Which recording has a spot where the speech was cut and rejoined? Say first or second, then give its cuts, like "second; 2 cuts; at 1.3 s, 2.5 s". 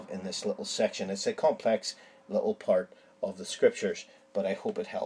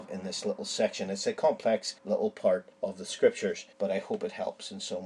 second; 3 cuts; at 2.0 s, 2.7 s, 3.7 s